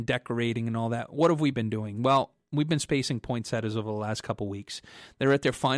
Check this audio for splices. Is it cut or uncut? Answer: uncut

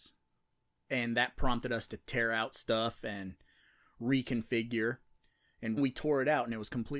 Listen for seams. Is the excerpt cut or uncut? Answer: cut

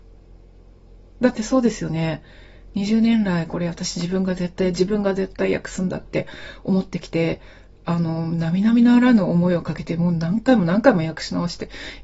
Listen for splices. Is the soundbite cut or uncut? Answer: uncut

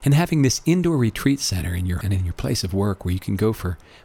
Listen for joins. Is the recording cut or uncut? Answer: cut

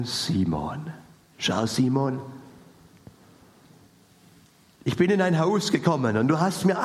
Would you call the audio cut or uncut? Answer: uncut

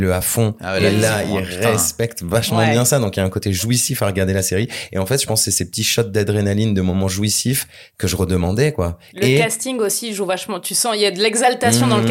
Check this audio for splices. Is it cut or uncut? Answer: uncut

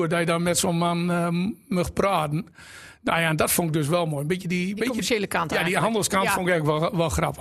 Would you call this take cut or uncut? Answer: uncut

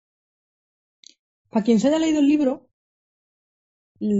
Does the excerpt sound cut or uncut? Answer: uncut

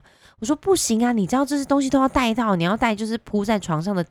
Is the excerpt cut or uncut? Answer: uncut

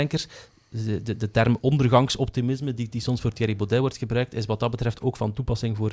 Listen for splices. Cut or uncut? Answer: uncut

